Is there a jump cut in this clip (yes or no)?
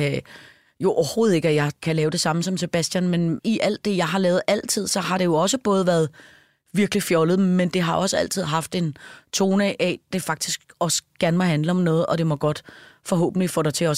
no